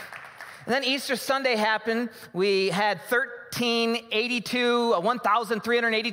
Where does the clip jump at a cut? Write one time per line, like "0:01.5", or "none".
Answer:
none